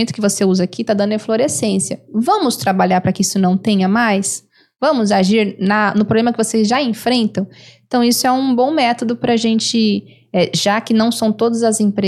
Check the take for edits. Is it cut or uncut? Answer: uncut